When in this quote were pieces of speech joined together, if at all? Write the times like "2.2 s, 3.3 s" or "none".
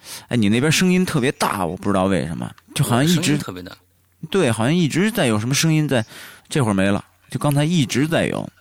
2.6 s, 6.4 s